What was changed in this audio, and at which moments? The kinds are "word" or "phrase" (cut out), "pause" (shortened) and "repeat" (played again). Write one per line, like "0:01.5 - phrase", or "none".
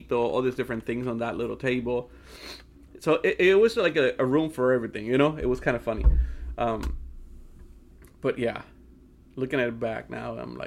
none